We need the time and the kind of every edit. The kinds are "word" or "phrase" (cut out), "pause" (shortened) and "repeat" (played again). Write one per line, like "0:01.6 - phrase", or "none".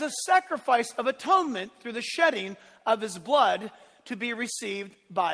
none